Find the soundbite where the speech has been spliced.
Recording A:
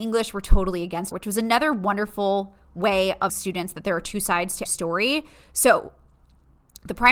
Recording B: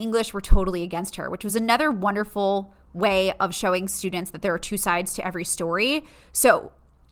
A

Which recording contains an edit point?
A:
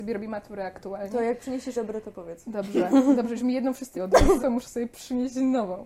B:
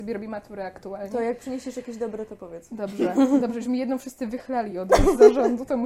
A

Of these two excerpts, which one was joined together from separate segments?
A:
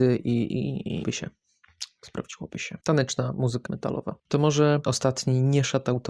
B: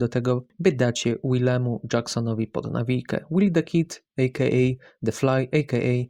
A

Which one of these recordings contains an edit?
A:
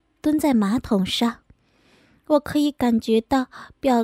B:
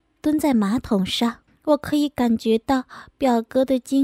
B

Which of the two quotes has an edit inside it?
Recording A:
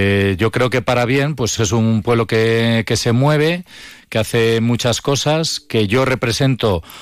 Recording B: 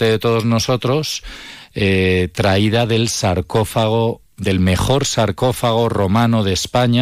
A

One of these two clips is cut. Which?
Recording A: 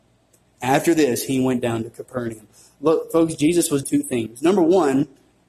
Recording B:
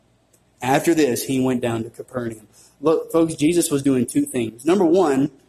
A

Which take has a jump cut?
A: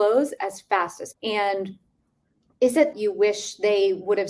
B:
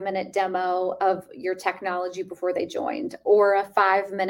A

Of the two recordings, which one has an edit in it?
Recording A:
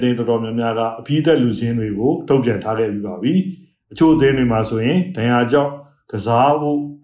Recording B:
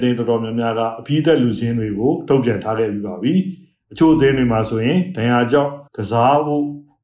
B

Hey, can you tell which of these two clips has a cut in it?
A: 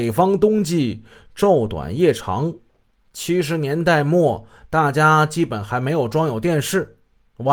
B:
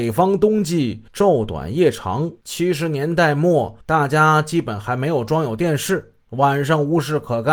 B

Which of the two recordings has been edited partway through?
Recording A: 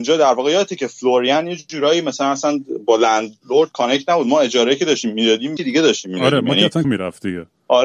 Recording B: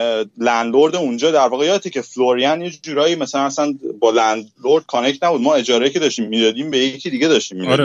A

